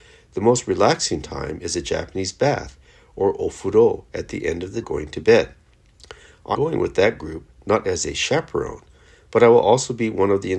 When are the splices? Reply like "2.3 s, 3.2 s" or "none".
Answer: 4.8 s, 6.5 s